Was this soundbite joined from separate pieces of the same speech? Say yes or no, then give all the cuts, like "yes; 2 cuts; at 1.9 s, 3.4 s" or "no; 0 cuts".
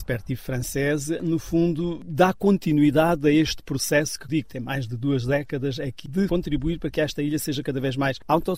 yes; 2 cuts; at 4.3 s, 6.1 s